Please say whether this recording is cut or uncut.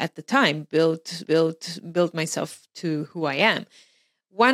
cut